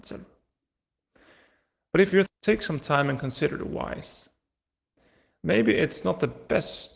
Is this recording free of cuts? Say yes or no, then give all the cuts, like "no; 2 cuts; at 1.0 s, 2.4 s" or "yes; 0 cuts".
no; 1 cut; at 2.3 s